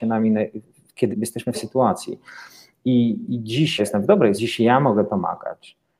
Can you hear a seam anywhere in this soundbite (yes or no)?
yes